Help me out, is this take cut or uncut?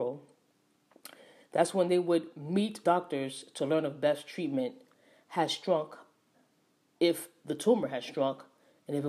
cut